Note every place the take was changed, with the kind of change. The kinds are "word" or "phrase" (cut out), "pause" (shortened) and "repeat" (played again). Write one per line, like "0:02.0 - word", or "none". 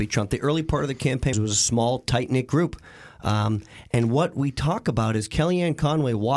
0:01.3 - phrase